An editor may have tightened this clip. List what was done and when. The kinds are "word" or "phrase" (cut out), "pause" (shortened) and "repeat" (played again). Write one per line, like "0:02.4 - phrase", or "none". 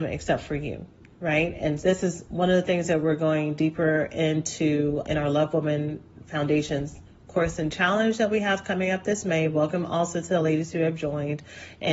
0:01.8 - word
0:05.0 - word

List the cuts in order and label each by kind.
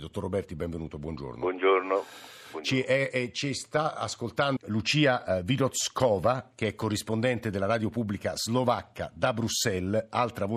0:04.6 - word

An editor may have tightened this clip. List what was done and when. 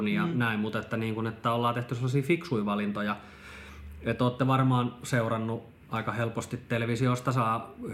0:05.8 - pause

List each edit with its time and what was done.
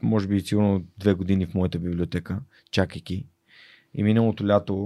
none

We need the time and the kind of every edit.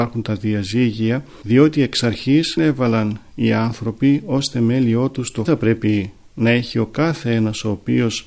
0:02.6 - word
0:05.5 - phrase

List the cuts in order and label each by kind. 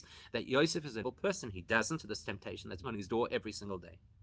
0:01.0 - word
0:02.0 - word
0:02.8 - word

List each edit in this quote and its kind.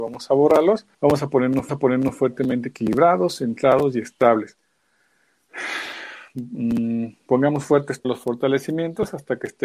0:00.9 - pause
0:01.7 - repeat
0:08.0 - word

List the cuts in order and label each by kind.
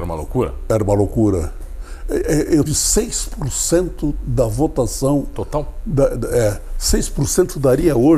0:02.7 - word

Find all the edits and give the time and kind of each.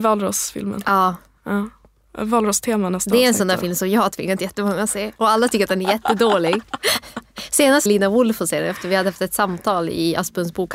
0:07.9 - phrase

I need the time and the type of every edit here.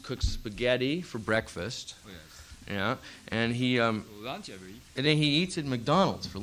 none

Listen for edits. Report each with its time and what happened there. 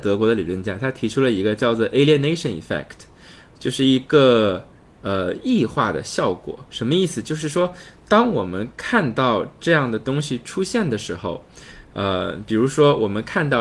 0:06.7 - pause

